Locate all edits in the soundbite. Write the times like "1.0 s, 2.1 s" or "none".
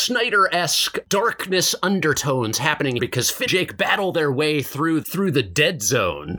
1.0 s, 3.0 s, 3.5 s, 5.0 s